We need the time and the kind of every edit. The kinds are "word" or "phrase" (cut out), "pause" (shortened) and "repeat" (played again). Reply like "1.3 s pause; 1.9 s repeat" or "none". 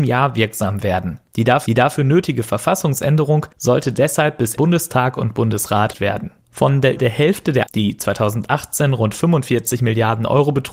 1.3 s pause; 1.7 s repeat; 3.5 s pause; 4.6 s phrase; 5.9 s word; 6.4 s pause; 7.0 s word; 7.7 s word